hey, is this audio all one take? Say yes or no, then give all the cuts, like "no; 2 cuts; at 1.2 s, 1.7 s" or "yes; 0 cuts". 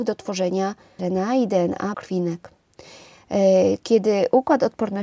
no; 2 cuts; at 1.0 s, 1.9 s